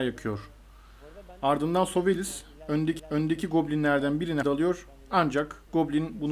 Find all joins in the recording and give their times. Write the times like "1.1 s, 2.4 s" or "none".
3.0 s, 4.4 s